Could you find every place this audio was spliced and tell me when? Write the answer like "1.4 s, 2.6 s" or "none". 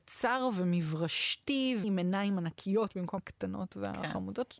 1.8 s, 3.2 s